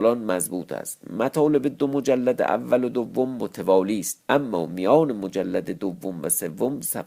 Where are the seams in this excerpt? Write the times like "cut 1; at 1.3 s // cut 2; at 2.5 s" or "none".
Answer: cut 1; at 4.2 s